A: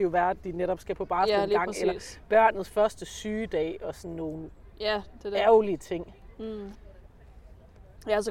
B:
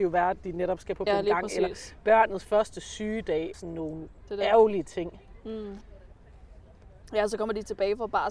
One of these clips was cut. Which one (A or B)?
B